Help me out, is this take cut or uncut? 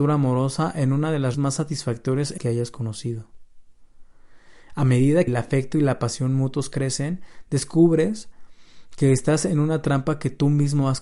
cut